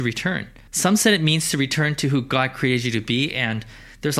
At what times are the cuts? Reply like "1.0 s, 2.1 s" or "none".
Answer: none